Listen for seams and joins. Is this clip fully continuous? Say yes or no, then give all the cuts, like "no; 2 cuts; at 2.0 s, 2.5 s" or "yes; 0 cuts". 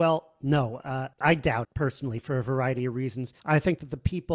no; 3 cuts; at 1.1 s, 1.6 s, 3.4 s